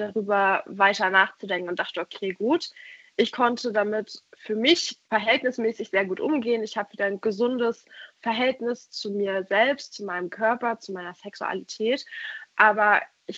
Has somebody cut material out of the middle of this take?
yes; 1 cut; at 5.0 s

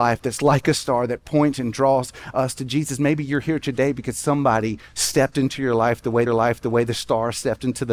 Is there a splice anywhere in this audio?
yes; 2 cuts; at 4.9 s, 6.3 s

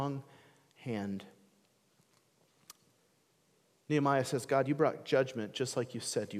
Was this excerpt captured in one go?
yes; 0 cuts

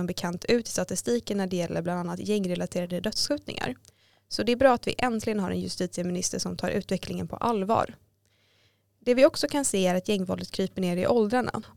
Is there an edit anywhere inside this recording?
no; 0 cuts

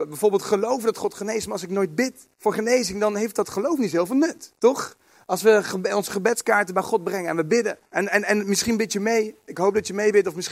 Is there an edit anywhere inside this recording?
yes; 3 cuts; at 2.3 s, 4.6 s, 7.9 s

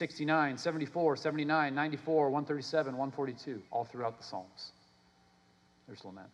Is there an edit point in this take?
yes; 1 cut; at 3.7 s

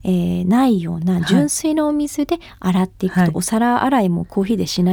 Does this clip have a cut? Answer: no; 0 cuts

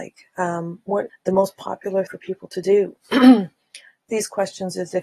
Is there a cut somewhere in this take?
yes; 3 cuts; at 1.1 s, 2.1 s, 4.1 s

